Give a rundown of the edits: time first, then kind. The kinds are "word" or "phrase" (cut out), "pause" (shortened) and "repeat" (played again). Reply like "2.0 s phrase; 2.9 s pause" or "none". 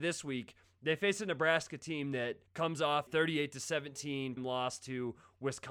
2.5 s pause; 3.1 s word; 4.4 s word